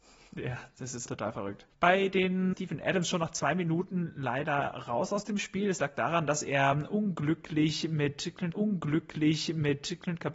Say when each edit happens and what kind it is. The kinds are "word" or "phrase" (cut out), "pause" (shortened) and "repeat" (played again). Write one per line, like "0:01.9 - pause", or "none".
0:01.1 - word
0:01.7 - pause
0:02.5 - phrase
0:08.5 - repeat